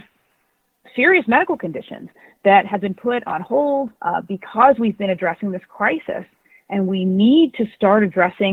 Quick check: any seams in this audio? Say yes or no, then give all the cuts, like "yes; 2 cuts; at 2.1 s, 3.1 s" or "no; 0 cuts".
yes; 1 cut; at 4.0 s